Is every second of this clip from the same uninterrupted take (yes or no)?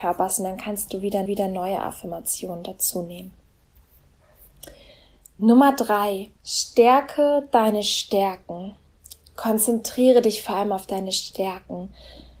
no